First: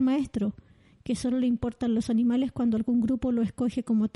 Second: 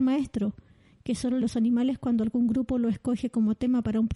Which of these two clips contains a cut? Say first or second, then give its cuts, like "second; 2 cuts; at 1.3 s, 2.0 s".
second; 1 cut; at 1.4 s